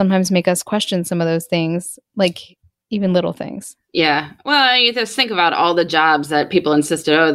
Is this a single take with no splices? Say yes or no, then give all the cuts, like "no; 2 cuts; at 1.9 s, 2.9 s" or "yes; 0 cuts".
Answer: yes; 0 cuts